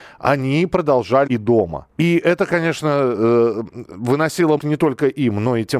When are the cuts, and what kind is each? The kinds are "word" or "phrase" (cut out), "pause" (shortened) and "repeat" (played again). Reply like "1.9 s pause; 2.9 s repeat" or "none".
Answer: 1.3 s word; 1.9 s pause; 4.6 s word